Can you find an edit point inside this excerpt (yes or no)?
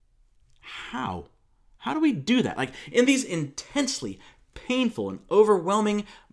no